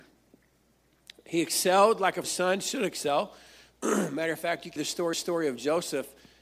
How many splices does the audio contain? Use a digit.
3